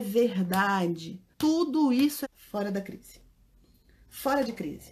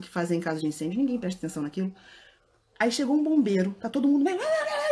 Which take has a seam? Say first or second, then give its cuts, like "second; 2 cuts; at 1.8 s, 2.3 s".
first; 2 cuts; at 1.3 s, 2.2 s